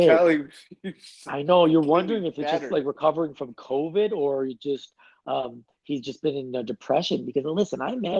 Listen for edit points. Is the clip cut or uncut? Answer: uncut